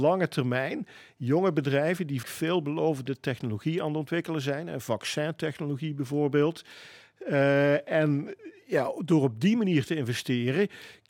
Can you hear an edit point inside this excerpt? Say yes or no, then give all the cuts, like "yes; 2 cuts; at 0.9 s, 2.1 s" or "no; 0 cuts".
yes; 1 cut; at 2.2 s